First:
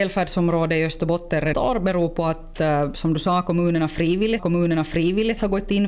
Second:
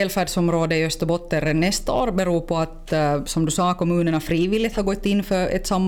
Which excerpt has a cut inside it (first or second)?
first